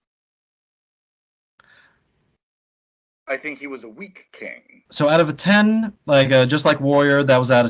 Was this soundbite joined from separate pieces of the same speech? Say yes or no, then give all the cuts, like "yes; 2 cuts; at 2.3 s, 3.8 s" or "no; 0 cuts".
yes; 2 cuts; at 4.9 s, 6.0 s